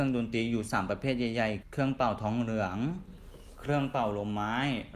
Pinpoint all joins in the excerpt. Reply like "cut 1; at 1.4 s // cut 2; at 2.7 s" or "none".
cut 1; at 1.6 s